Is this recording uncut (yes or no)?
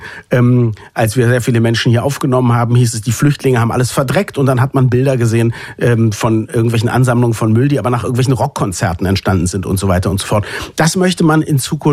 yes